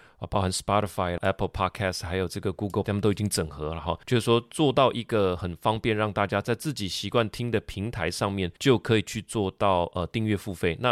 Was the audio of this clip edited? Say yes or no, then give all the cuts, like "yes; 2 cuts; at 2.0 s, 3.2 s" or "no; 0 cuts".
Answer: yes; 4 cuts; at 1.2 s, 2.8 s, 4.0 s, 8.6 s